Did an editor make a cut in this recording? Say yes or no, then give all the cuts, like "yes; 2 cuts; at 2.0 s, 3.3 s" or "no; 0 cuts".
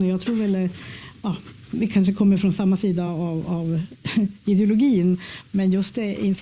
no; 0 cuts